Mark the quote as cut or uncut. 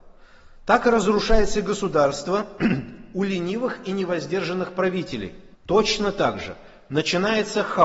cut